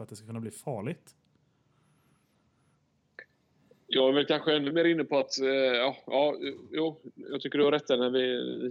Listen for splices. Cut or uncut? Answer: uncut